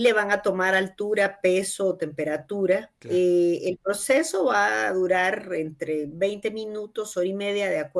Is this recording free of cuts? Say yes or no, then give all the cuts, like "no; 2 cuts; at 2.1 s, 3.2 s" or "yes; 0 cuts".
no; 1 cut; at 3.0 s